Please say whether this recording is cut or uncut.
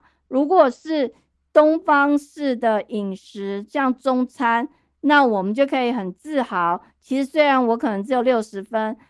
uncut